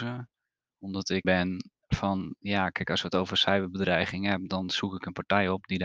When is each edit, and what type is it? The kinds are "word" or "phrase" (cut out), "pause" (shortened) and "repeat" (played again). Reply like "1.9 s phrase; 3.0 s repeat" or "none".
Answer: 1.2 s phrase; 1.8 s pause